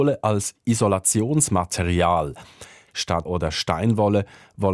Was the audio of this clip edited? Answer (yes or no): yes